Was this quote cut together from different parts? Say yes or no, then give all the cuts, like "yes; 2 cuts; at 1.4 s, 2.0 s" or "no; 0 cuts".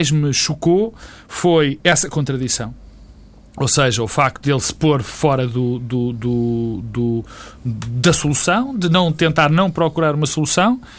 no; 0 cuts